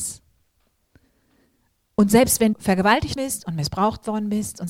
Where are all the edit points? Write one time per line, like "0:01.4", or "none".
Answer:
0:02.5
0:03.2